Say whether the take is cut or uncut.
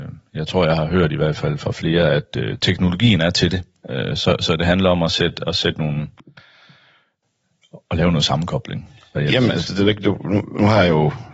uncut